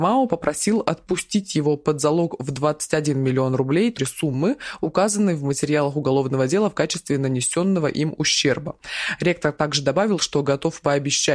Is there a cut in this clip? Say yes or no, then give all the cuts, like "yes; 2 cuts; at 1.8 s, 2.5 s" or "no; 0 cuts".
yes; 1 cut; at 4.0 s